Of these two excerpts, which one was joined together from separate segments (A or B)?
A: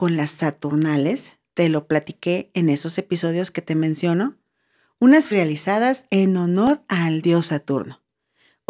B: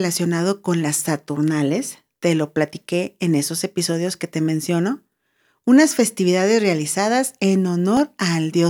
A